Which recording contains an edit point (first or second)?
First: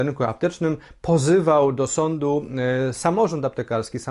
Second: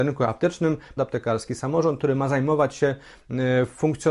second